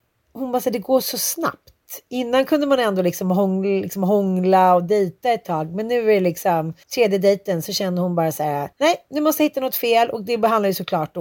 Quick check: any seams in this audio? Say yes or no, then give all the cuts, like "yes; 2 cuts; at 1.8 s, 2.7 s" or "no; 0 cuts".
yes; 2 cuts; at 6.8 s, 8.7 s